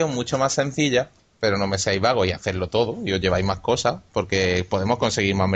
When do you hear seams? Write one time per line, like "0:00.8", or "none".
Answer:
0:01.2